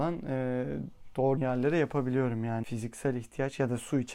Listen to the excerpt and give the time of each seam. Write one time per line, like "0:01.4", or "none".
0:01.4
0:02.6